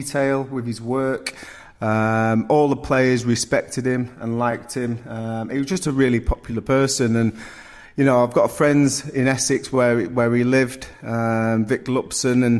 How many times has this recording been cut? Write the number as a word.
zero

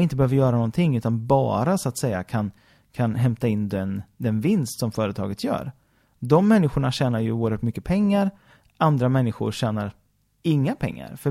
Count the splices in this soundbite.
zero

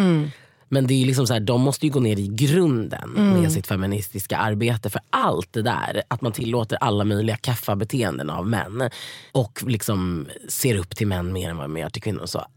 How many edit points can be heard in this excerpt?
one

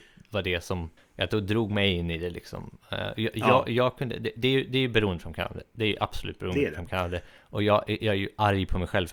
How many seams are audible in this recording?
one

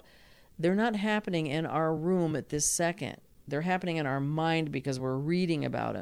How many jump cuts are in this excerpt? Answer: zero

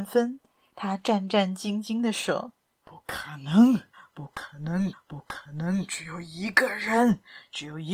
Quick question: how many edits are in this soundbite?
one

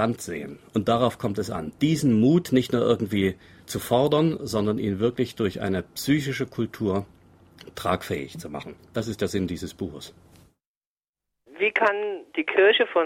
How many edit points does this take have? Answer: zero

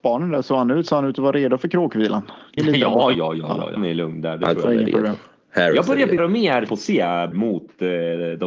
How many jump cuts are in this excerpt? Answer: six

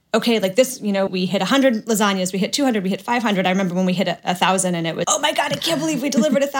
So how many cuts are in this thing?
two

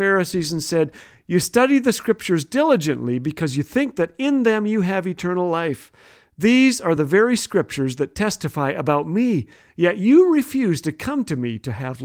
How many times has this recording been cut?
zero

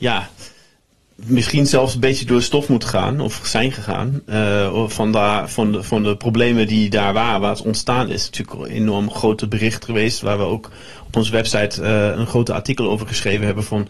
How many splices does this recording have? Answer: one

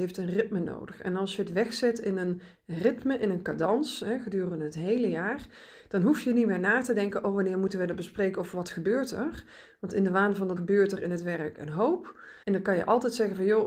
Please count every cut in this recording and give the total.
two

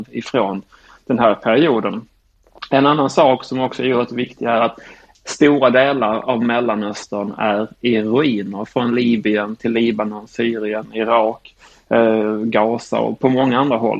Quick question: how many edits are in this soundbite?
zero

